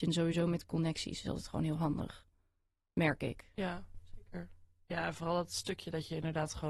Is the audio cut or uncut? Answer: uncut